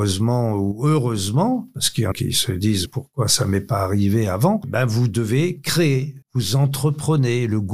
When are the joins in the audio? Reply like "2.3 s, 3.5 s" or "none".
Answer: 2.1 s, 2.9 s, 6.2 s